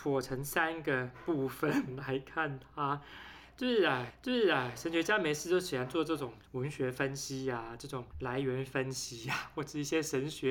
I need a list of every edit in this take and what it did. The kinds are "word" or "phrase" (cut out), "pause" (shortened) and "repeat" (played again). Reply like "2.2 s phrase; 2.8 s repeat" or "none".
4.1 s repeat; 8.1 s pause